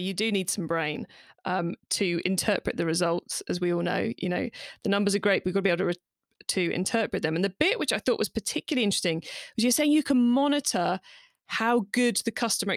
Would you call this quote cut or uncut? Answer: uncut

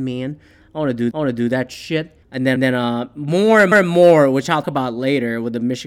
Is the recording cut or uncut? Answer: cut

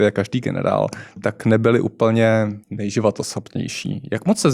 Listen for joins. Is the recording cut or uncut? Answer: cut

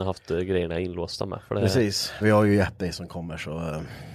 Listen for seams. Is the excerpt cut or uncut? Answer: cut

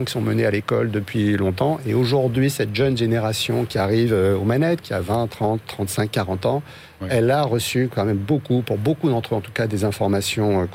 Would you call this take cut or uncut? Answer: cut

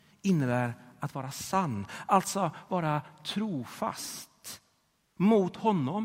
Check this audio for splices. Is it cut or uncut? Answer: uncut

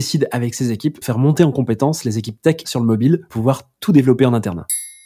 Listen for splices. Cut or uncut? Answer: cut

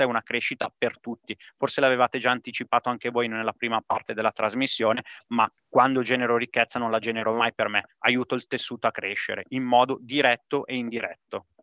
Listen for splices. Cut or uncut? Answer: cut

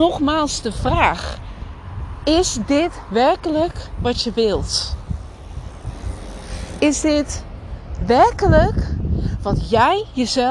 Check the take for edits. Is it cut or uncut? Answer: uncut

